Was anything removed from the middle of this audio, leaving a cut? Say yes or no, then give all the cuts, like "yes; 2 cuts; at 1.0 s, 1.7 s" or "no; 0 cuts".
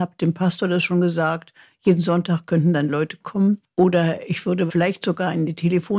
no; 0 cuts